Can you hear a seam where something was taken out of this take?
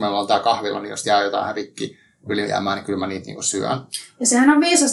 yes; 1 cut; at 1.0 s

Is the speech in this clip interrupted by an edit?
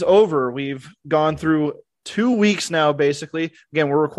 no; 0 cuts

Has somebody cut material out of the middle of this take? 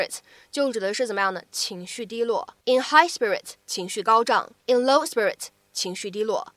yes; 3 cuts; at 2.6 s, 3.6 s, 4.6 s

